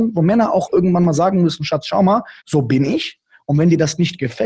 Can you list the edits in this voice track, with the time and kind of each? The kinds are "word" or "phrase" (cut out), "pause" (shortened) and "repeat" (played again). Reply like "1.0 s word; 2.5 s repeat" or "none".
2.4 s pause